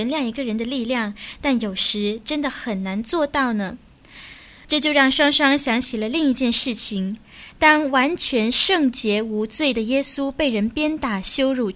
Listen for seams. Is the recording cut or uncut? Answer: uncut